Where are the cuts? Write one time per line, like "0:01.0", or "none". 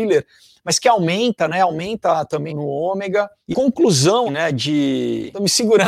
0:02.5
0:03.5
0:04.3

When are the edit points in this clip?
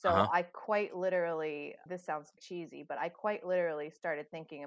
0:01.9
0:02.4

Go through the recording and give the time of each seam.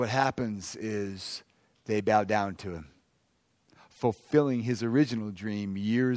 none

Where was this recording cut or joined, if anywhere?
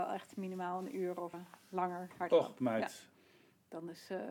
0:01.3

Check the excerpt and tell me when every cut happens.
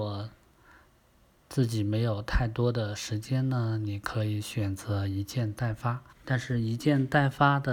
0:06.1

